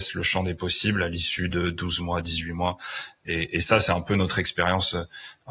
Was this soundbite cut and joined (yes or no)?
no